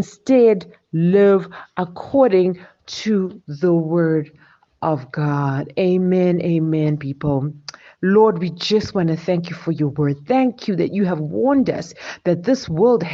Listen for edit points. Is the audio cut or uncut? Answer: uncut